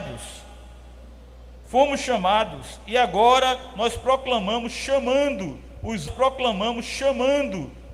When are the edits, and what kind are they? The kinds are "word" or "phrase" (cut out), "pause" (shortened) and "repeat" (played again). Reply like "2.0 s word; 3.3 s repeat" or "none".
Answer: 6.1 s repeat